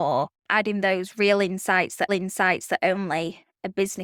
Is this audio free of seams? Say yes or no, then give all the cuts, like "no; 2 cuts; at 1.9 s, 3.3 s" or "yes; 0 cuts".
no; 1 cut; at 2.1 s